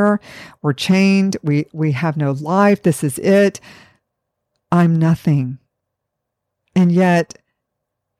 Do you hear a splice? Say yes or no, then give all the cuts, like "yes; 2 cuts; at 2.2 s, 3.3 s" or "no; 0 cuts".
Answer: no; 0 cuts